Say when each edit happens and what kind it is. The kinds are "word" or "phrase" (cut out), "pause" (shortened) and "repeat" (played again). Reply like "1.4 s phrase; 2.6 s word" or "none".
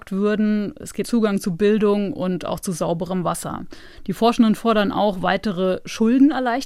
1.0 s word